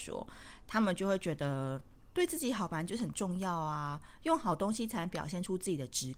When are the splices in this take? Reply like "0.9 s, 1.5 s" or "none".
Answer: 2.0 s